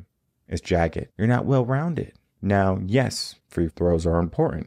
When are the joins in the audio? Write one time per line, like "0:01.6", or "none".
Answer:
0:01.1